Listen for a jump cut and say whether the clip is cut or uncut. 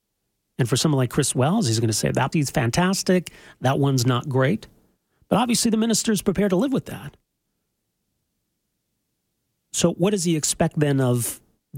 cut